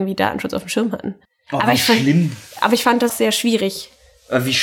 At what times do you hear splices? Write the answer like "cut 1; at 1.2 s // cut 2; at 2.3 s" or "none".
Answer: cut 1; at 1.2 s // cut 2; at 3.1 s